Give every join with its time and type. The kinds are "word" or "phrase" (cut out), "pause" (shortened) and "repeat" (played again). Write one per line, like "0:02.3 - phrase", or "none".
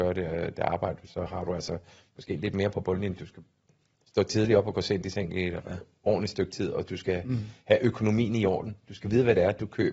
none